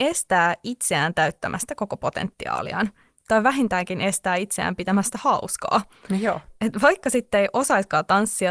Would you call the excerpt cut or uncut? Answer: uncut